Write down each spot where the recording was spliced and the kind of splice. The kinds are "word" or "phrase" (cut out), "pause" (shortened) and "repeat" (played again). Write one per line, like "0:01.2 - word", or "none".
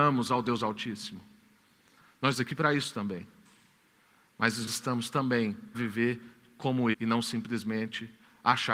0:02.3 - word
0:04.7 - word
0:05.7 - word
0:06.9 - word

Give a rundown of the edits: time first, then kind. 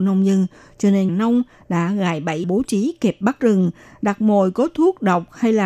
0:01.1 - word
0:02.4 - phrase
0:03.4 - word

